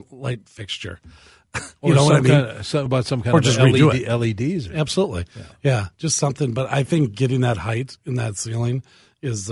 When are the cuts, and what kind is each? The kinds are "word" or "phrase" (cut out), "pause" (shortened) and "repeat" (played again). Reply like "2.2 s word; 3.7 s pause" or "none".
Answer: 2.9 s word

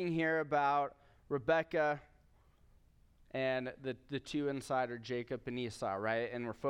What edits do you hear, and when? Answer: none

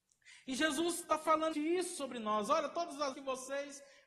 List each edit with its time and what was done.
1.5 s word; 3.1 s word

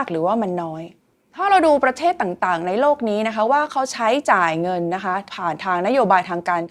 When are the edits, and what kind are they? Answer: none

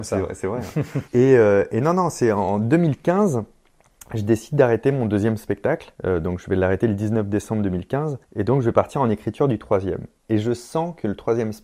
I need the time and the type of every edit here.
1.1 s pause; 6.0 s pause; 8.2 s pause

